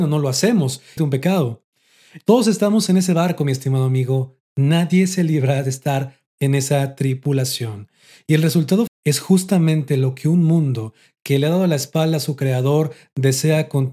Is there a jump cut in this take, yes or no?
yes